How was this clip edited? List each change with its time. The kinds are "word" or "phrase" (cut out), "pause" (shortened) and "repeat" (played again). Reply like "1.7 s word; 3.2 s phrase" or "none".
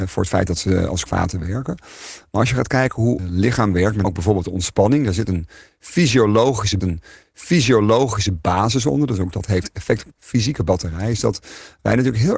1.1 s word; 3.2 s word; 4.0 s word; 6.8 s repeat; 10.1 s word

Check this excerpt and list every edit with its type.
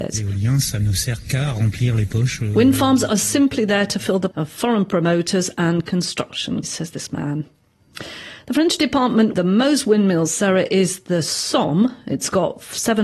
4.3 s word; 6.6 s word; 9.3 s word

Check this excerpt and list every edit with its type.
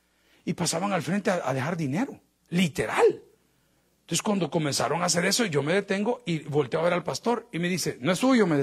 2.4 s pause

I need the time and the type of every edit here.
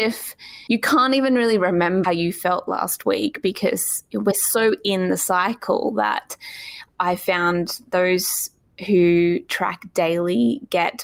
2.0 s word

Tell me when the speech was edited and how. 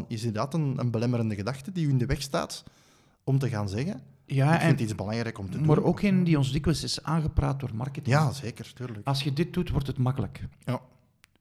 none

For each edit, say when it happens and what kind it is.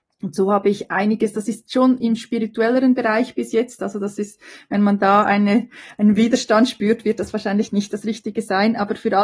none

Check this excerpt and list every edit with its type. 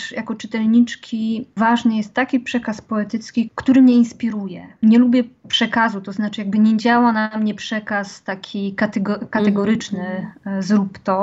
none

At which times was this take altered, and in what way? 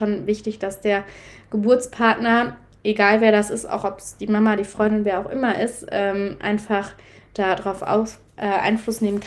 none

